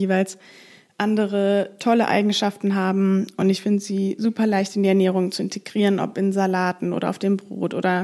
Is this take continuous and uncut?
yes; 0 cuts

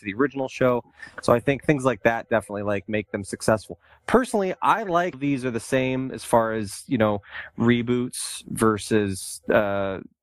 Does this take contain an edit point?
yes; 1 cut; at 5.1 s

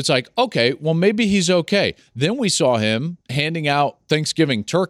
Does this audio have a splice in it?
yes; 1 cut; at 3.2 s

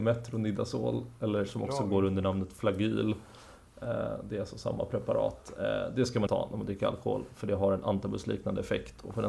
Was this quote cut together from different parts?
yes; 1 cut; at 6.3 s

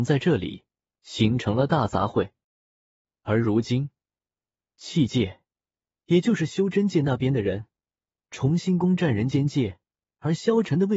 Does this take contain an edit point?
no; 0 cuts

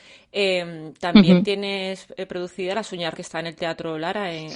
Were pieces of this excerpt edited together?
yes; 1 cut; at 3.1 s

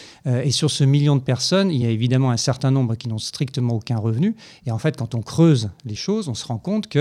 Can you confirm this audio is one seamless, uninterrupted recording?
yes; 0 cuts

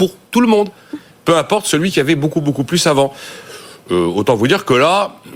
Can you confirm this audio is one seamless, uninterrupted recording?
yes; 0 cuts

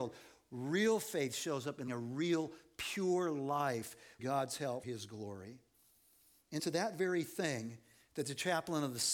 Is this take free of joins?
no; 4 cuts; at 1.9 s, 4.2 s, 4.8 s, 6.6 s

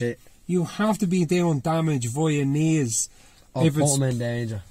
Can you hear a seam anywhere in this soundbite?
no; 0 cuts

